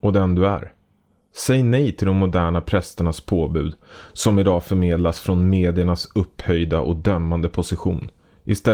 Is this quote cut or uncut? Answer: uncut